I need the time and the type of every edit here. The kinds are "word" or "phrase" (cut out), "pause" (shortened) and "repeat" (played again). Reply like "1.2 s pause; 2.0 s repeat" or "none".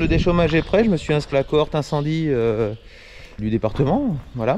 1.3 s word; 3.4 s word